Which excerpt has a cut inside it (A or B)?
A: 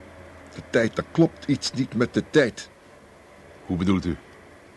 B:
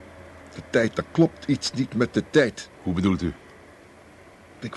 B